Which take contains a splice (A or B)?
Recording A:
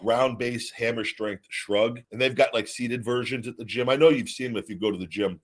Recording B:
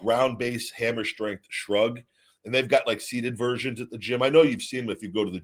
A